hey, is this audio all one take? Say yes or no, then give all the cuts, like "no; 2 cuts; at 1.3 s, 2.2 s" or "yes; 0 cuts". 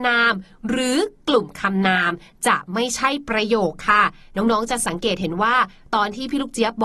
yes; 0 cuts